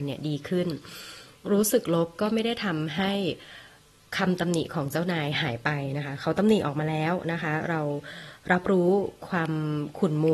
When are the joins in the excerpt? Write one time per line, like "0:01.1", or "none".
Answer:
none